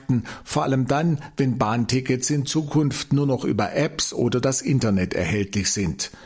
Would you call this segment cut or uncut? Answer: uncut